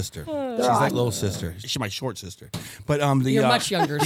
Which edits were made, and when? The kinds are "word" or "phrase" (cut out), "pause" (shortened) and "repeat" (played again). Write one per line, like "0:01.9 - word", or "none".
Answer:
0:00.9 - word
0:01.6 - phrase